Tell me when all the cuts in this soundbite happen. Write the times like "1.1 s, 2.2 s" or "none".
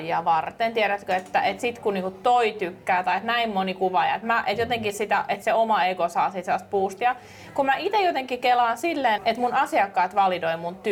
9.2 s